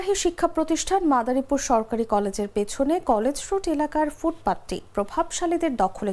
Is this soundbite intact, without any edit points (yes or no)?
yes